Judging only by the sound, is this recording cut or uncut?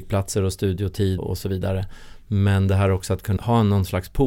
cut